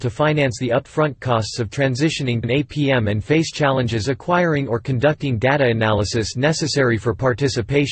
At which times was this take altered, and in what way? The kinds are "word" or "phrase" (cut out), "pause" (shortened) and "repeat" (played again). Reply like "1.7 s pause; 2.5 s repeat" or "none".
2.4 s word

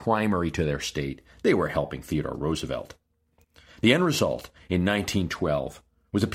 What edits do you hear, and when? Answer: none

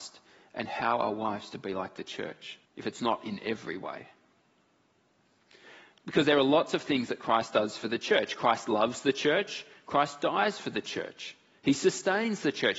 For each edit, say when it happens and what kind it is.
2.7 s pause; 5.9 s pause

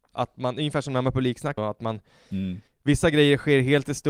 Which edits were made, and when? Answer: 1.6 s phrase; 2.7 s pause

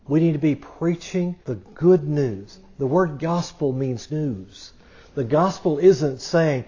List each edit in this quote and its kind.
1.4 s pause; 4.1 s word

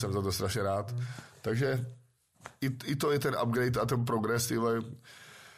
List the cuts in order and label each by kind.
none

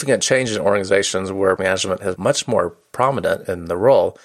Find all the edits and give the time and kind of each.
1.6 s word; 2.2 s word

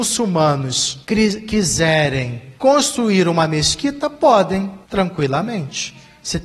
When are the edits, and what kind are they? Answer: 1.0 s pause; 2.6 s pause; 4.8 s pause

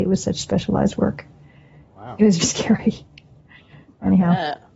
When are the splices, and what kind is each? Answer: 2.4 s word

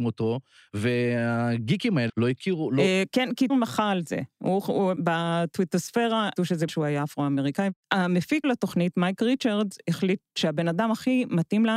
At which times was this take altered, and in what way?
2.1 s word; 3.5 s word; 5.0 s word; 6.4 s word; 6.7 s word; 8.4 s word

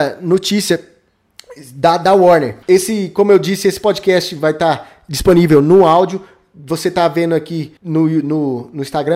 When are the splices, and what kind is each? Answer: 2.6 s pause; 7.8 s pause

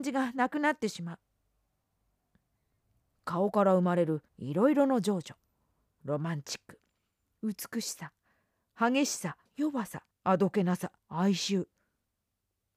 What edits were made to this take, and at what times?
4.3 s pause; 9.5 s pause; 10.1 s pause; 11.0 s pause

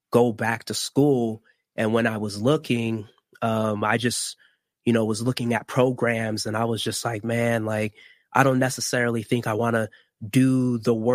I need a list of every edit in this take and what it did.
none

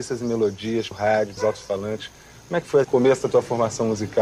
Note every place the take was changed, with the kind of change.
0.9 s word; 1.4 s word; 2.8 s word

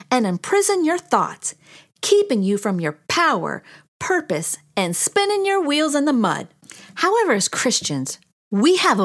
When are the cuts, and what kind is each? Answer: none

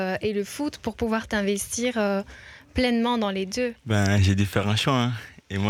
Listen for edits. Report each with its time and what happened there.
3.8 s pause

